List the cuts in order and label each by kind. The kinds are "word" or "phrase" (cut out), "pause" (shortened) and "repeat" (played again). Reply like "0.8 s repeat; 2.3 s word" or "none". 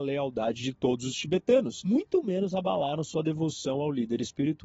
none